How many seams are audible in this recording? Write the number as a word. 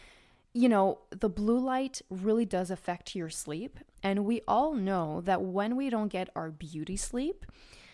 zero